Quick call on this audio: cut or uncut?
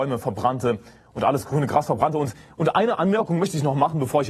uncut